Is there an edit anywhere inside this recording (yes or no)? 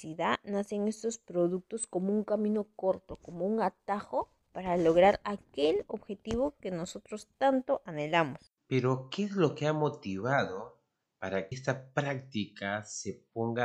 yes